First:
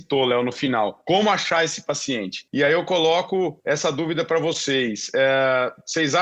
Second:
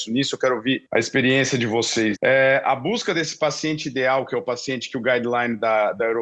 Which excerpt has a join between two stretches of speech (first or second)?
second